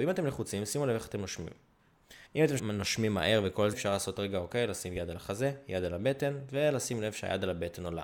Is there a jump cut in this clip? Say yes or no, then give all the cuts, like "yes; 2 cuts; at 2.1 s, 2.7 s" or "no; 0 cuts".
yes; 3 cuts; at 2.3 s, 2.6 s, 3.7 s